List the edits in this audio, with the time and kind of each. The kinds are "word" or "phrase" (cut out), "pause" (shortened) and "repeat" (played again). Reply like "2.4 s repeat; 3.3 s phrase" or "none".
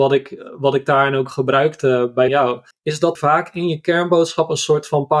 2.3 s phrase; 2.7 s pause; 3.2 s word